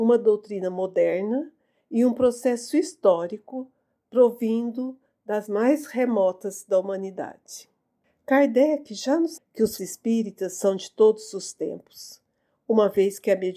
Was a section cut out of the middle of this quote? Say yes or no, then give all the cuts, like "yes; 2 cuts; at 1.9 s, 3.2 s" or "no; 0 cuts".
yes; 3 cuts; at 5.5 s, 9.4 s, 9.8 s